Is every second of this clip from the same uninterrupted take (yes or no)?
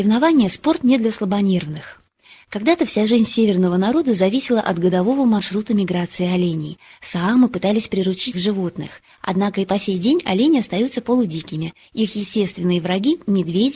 no